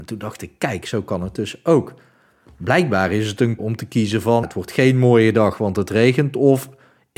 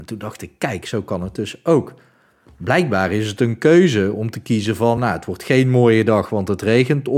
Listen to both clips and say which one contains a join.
first; 2 cuts; at 3.6 s, 4.4 s

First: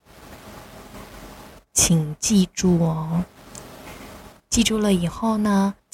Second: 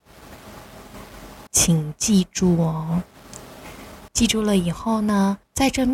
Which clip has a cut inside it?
second; 2 cuts; at 1.5 s, 4.1 s

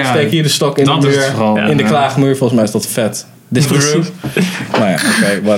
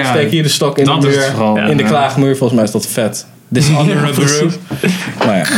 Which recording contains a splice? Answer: first; 1 cut; at 3.6 s

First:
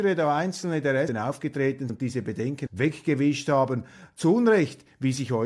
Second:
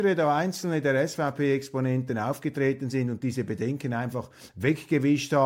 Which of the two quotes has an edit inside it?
first; 3 cuts; at 1.1 s, 1.9 s, 2.7 s

